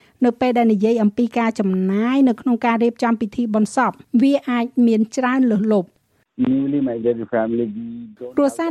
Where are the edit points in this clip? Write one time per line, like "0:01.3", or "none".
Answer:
none